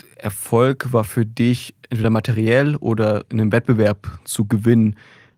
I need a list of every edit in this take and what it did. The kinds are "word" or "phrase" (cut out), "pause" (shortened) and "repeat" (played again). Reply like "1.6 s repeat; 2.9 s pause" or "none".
none